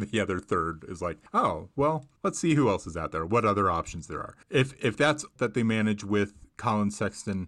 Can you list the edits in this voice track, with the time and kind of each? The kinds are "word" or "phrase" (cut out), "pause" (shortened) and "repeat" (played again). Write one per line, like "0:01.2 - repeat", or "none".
0:01.3 - pause
0:02.2 - pause
0:04.4 - pause
0:05.4 - word